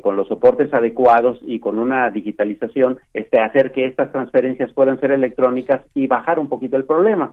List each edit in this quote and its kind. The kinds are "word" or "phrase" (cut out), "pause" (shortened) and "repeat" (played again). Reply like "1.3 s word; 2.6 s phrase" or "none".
3.0 s pause

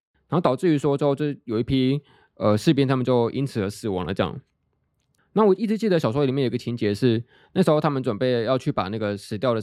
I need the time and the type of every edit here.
none

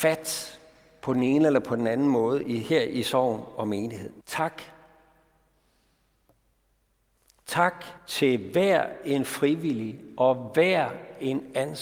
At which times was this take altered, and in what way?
4.2 s pause; 8.0 s pause

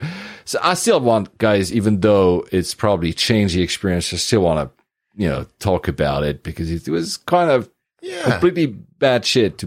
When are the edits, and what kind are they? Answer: none

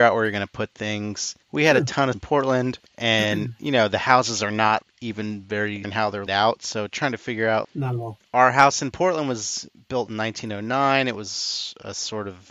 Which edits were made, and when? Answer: 1.4 s pause; 2.1 s phrase; 2.9 s pause; 4.8 s word; 5.8 s word; 6.3 s word; 7.6 s word

